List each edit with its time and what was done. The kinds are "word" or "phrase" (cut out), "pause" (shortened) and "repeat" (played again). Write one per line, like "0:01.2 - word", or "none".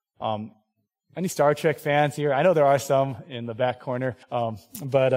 0:04.2 - pause